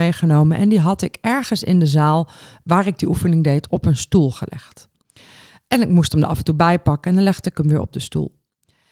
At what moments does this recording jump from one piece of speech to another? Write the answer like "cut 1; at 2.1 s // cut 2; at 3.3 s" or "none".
none